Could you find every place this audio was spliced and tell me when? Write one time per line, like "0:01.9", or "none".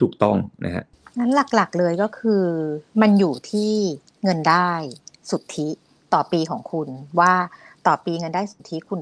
0:02.9

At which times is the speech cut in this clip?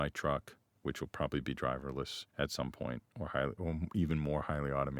0:02.3

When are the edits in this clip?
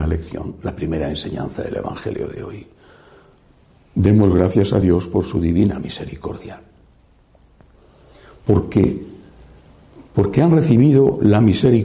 none

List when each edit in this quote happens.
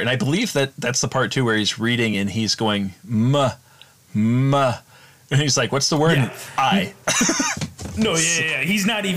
none

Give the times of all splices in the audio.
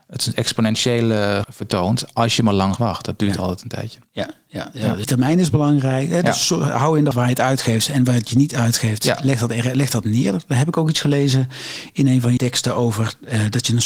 0:01.4
0:02.8
0:05.0
0:07.1
0:12.4

